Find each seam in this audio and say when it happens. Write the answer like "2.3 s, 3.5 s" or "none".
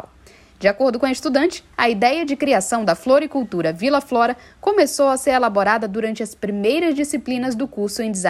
none